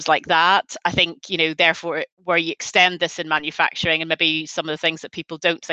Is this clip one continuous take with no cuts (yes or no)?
no